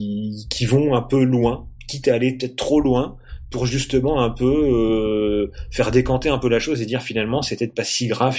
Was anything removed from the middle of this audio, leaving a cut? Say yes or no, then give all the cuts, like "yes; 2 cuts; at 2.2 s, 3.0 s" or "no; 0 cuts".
no; 0 cuts